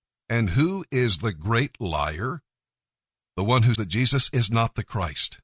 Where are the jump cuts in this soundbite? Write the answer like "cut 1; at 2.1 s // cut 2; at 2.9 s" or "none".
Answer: cut 1; at 3.8 s